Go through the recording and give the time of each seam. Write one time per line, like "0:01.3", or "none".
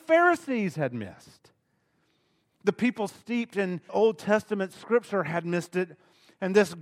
0:03.9